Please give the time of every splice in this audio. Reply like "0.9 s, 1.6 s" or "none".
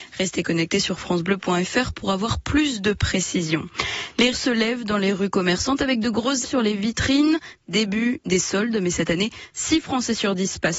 4.3 s, 6.4 s